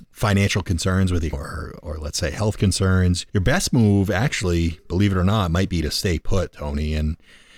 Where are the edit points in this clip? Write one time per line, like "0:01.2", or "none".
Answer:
0:01.3
0:03.3